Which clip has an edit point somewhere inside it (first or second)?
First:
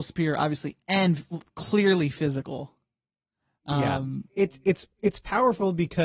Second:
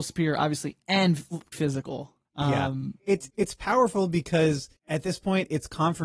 second